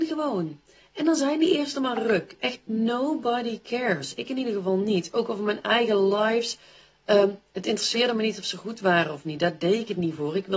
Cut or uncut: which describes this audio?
uncut